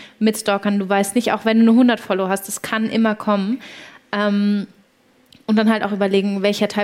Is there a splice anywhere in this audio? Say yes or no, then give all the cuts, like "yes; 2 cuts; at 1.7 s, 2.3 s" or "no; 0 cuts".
no; 0 cuts